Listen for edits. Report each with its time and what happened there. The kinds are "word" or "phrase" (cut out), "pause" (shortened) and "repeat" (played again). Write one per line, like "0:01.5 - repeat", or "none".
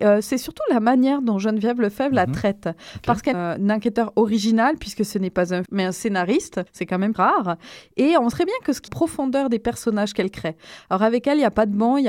0:03.3 - phrase
0:05.7 - word
0:06.7 - pause
0:07.1 - word
0:08.3 - word
0:08.9 - phrase